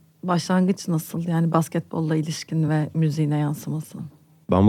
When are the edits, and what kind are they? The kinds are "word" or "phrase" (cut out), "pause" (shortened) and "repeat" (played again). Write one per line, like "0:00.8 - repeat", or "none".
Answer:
none

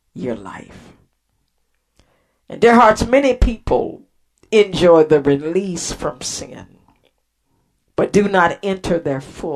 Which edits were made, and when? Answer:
none

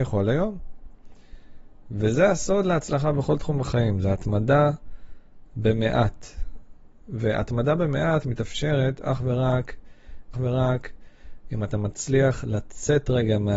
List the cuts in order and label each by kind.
0:10.3 - repeat

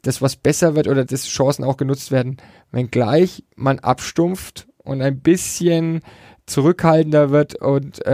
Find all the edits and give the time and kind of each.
0:01.1 - word

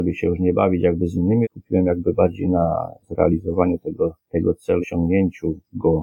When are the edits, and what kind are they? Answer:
0:01.4 - phrase
0:03.0 - pause
0:04.8 - word

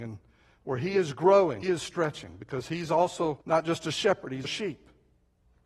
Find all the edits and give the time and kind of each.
0:01.6 - word
0:03.4 - pause
0:04.4 - word

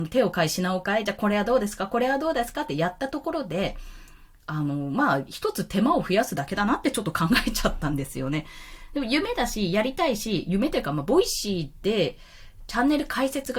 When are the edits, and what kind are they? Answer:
none

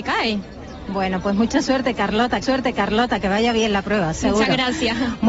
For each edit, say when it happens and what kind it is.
0:02.4 - repeat

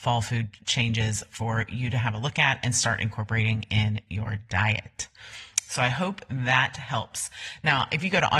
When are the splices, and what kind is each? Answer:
none

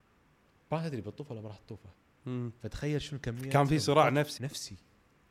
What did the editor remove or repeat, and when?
0:04.4 - word

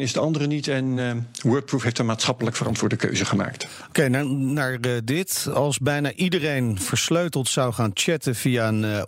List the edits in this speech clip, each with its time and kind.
none

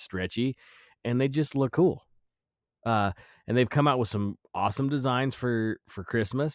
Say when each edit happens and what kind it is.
0:01.7 - word

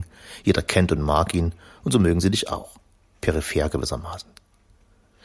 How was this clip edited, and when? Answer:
none

